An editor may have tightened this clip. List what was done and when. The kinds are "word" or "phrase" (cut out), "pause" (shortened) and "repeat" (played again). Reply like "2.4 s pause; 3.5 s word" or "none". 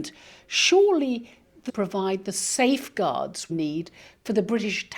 1.7 s word; 3.5 s word